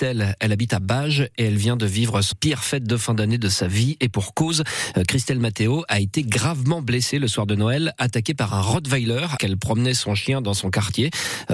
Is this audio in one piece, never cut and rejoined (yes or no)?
no